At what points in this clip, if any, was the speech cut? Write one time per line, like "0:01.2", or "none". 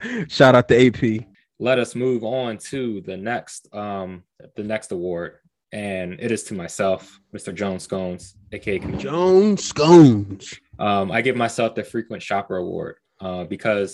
0:08.4